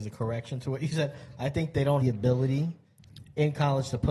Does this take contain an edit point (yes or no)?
yes